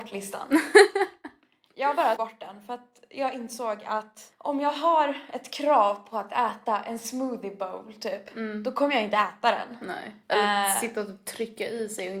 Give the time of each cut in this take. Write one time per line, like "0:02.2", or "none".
0:02.2
0:10.2